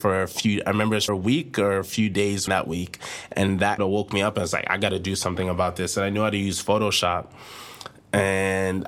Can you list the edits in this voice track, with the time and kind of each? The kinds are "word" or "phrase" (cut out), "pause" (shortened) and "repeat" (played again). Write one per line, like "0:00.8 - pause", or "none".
0:01.1 - word
0:02.5 - word
0:03.8 - word

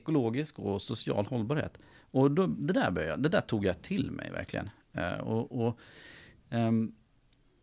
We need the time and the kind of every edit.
none

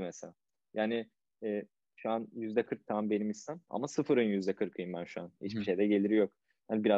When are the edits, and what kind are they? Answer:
none

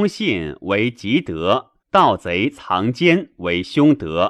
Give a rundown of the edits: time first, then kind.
0:01.8 - pause

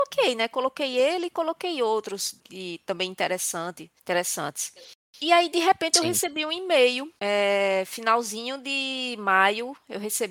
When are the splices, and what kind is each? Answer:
0:02.4 - pause
0:04.0 - pause
0:07.2 - pause

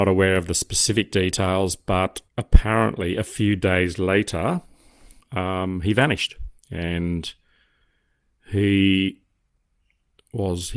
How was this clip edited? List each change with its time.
0:02.3 - pause
0:05.2 - pause
0:06.6 - pause

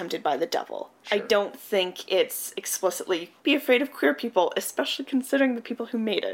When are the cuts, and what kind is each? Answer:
0:03.4 - pause

